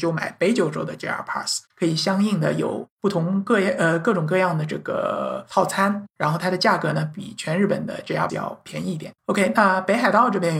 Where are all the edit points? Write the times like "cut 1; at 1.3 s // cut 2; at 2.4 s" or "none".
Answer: cut 1; at 1.7 s // cut 2; at 2.9 s // cut 3; at 8.3 s // cut 4; at 9.2 s